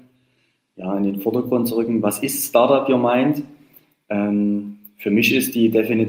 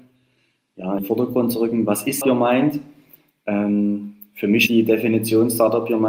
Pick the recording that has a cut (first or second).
second